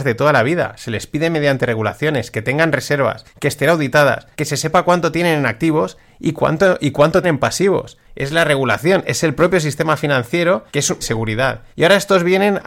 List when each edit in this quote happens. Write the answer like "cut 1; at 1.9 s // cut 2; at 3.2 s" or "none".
cut 1; at 3.3 s // cut 2; at 4.3 s // cut 3; at 7.2 s // cut 4; at 8.0 s // cut 5; at 10.7 s // cut 6; at 11.0 s // cut 7; at 11.7 s